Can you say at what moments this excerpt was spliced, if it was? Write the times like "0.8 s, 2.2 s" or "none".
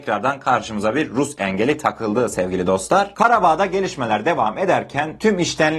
none

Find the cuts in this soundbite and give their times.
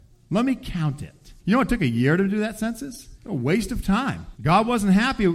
1.4 s, 3.1 s, 4.3 s

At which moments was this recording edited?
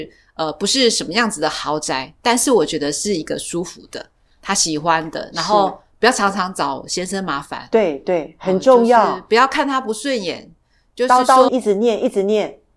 11.5 s

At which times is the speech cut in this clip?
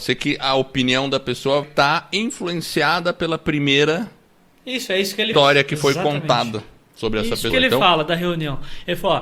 1.6 s, 5.3 s, 7.5 s

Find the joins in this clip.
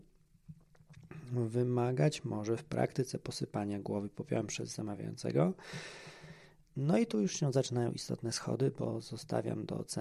none

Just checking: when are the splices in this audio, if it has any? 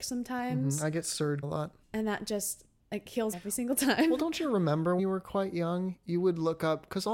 1.4 s, 1.8 s, 2.8 s, 3.3 s, 5.0 s

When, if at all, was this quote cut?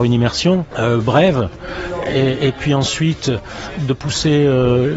none

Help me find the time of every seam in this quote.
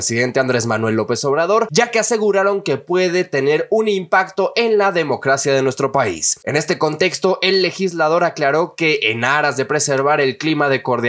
none

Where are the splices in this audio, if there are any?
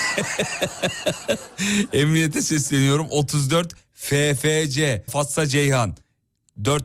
5.1 s

